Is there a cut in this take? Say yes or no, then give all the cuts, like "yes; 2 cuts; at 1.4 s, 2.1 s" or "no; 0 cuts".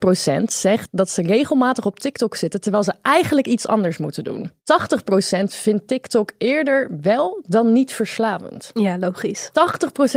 yes; 1 cut; at 4.6 s